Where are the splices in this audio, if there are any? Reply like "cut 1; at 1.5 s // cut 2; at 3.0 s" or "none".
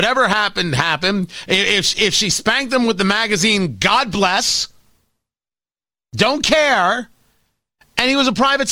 none